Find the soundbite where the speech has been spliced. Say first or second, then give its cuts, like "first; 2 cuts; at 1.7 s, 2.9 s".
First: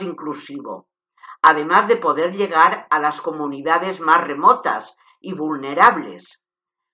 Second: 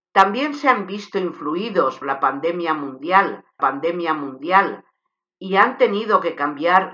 second; 2 cuts; at 2.0 s, 3.6 s